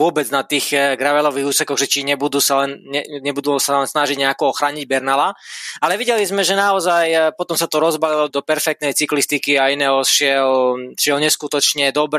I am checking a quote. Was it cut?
yes; 1 cut; at 8.3 s

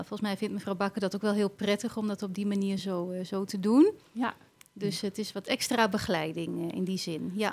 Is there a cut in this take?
no; 0 cuts

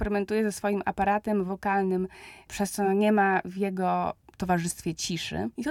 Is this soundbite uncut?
yes; 0 cuts

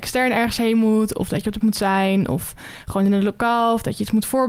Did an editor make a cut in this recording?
yes; 1 cut; at 1.6 s

